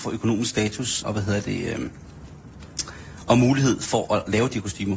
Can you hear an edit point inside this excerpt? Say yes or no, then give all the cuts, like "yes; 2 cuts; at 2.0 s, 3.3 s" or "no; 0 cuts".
yes; 1 cut; at 1.0 s